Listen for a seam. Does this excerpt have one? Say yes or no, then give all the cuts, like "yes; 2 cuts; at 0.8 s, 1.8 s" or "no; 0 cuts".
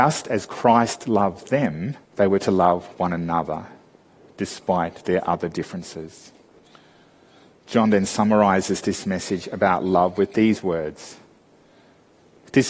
yes; 2 cuts; at 2.0 s, 6.6 s